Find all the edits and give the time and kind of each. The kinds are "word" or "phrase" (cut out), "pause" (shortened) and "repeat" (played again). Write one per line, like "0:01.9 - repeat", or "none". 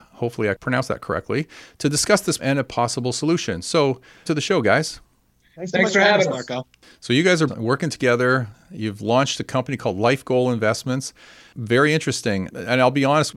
0:02.4 - word
0:04.3 - word
0:07.5 - word

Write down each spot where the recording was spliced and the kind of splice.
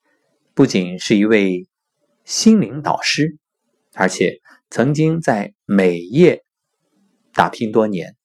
none

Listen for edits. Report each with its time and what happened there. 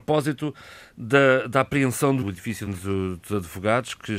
0:02.2 - word
0:02.7 - word

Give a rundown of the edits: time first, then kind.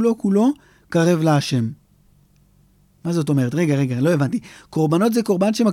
none

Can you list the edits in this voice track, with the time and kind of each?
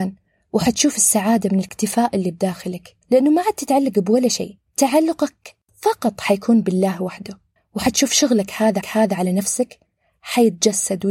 0:03.0 - pause
0:04.7 - pause
0:07.6 - pause
0:08.8 - repeat

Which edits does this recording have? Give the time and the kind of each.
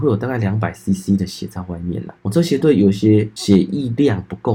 0:02.2 - pause

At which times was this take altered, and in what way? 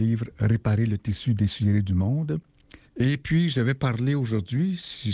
0:02.9 - pause

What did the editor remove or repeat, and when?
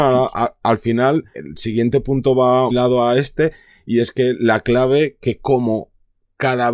0:01.3 - word
0:02.7 - word

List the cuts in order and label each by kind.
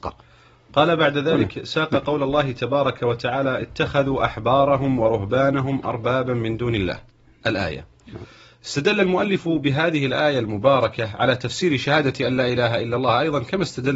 none

